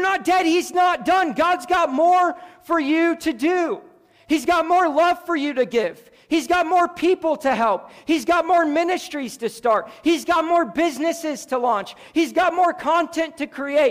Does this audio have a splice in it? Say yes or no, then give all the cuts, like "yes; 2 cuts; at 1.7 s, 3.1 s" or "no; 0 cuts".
no; 0 cuts